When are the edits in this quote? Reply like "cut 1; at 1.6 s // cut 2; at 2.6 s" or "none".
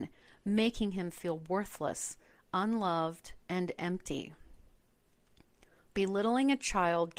cut 1; at 3.4 s